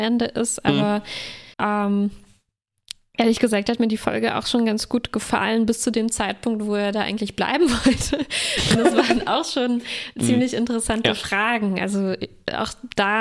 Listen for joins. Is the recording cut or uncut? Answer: cut